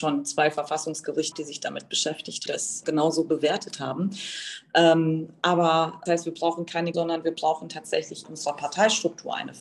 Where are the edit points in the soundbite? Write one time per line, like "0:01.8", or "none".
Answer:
0:01.3
0:02.5
0:02.8
0:06.1
0:06.9
0:08.2